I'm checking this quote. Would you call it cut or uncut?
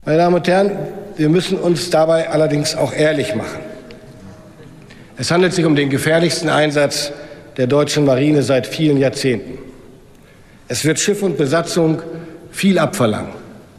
uncut